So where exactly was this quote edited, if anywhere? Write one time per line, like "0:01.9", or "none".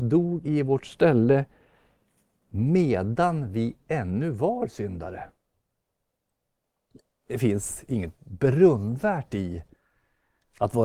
none